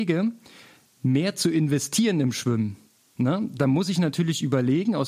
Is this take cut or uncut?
uncut